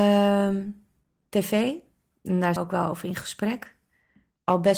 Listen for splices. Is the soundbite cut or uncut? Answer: cut